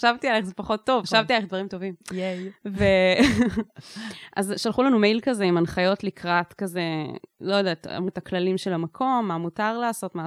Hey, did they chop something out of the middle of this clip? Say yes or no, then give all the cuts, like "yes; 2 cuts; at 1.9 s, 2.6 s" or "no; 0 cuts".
yes; 3 cuts; at 1.0 s, 2.0 s, 8.1 s